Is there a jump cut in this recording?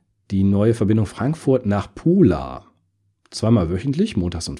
yes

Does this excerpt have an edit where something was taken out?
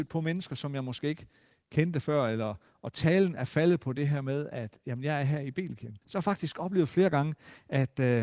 yes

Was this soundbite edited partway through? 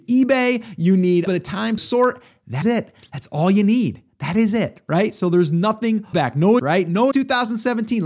yes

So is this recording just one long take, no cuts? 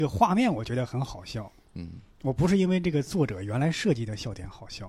yes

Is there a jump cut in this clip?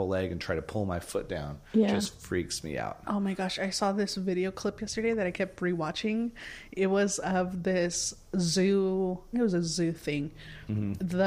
yes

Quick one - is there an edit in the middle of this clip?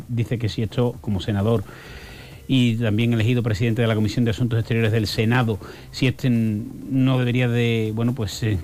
no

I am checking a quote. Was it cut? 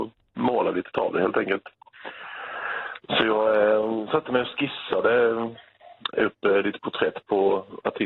no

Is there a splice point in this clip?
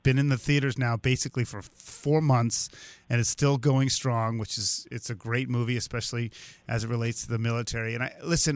no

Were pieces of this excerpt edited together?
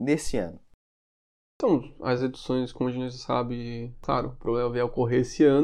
no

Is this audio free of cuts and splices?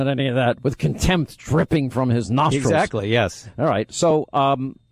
yes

